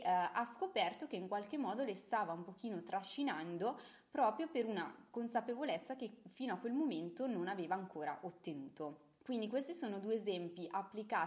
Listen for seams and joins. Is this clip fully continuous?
no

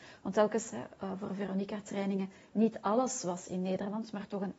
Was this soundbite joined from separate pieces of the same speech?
no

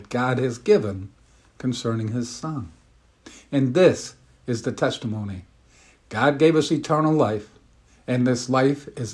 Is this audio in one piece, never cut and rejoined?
yes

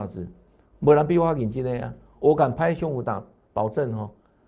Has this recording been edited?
no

